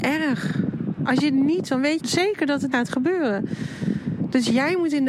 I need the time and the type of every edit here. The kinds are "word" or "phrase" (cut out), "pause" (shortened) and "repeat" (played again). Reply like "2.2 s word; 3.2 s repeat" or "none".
1.6 s word; 2.0 s word; 2.7 s word